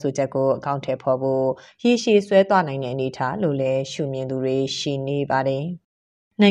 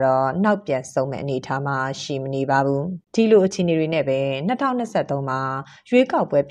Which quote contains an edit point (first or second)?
second